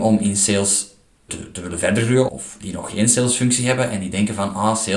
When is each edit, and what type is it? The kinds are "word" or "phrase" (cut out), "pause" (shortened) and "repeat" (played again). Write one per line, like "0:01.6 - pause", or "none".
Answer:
0:01.3 - word
0:02.3 - word